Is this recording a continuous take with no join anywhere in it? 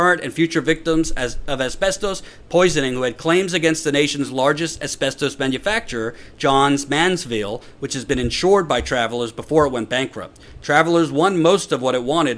yes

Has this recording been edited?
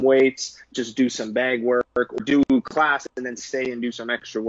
yes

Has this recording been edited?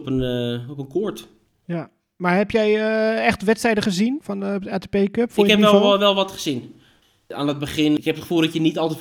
no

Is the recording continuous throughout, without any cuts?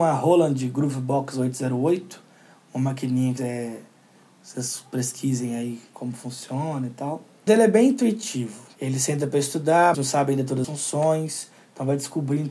no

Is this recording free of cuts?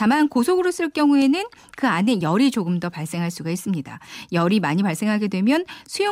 yes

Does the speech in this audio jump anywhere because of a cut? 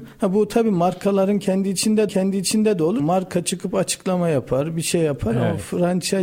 yes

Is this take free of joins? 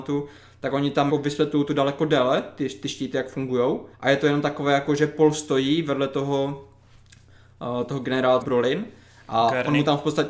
no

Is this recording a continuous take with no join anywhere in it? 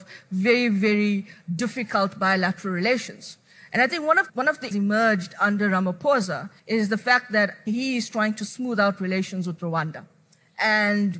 no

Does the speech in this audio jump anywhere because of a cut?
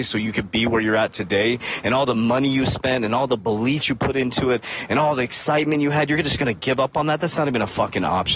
yes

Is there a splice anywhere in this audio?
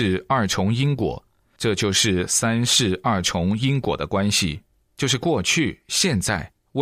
no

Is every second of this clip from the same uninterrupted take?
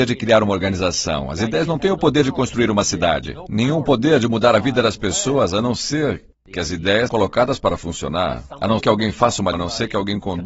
no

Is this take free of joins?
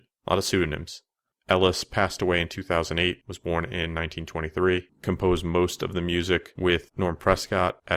yes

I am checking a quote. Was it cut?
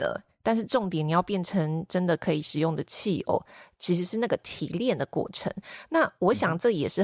no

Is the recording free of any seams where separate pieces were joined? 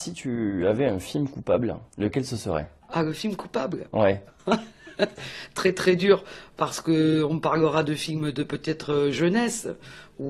no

